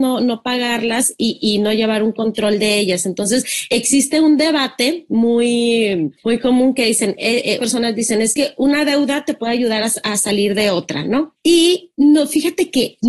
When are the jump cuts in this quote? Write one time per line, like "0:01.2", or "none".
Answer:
0:07.6